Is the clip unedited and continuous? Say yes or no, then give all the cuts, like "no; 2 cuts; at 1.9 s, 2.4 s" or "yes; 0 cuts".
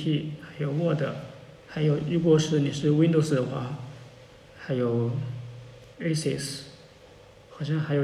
no; 2 cuts; at 1.6 s, 5.9 s